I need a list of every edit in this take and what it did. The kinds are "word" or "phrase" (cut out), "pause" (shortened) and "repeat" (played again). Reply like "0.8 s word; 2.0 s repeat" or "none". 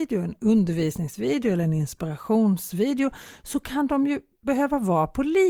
none